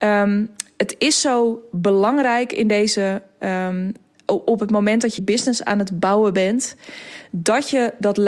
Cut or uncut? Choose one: cut